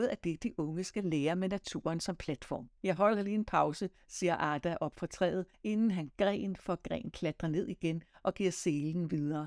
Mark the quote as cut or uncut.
cut